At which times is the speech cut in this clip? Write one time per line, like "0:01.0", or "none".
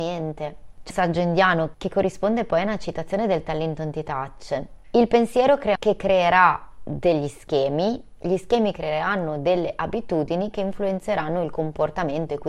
0:00.9
0:05.8